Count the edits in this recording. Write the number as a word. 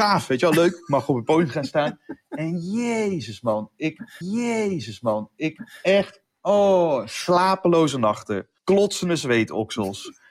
two